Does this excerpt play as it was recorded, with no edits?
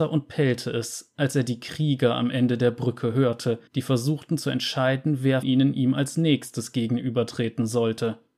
no; 2 cuts; at 3.7 s, 5.4 s

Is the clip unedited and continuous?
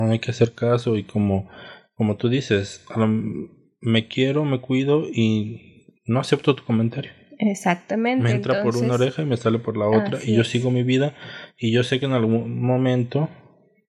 yes; 0 cuts

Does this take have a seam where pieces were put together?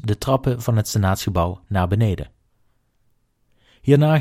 no; 0 cuts

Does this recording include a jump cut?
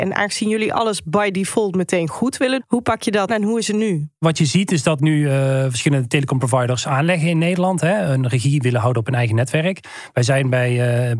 yes; 3 cuts; at 2.6 s, 3.3 s, 5.0 s

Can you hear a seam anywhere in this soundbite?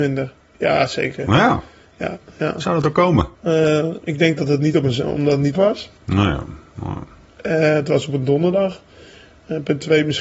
yes; 3 cuts; at 3.3 s, 5.5 s, 6.0 s

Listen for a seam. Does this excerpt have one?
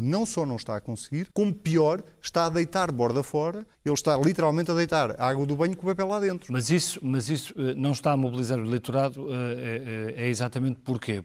yes; 2 cuts; at 1.3 s, 3.7 s

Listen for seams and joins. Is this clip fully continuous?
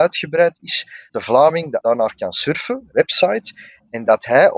no; 3 cuts; at 1.1 s, 1.8 s, 2.9 s

